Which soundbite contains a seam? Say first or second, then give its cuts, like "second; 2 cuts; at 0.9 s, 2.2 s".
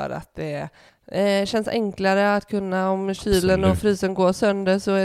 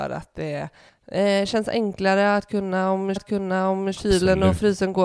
second; 1 cut; at 3.2 s